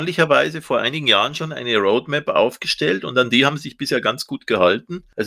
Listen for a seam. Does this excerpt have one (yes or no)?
no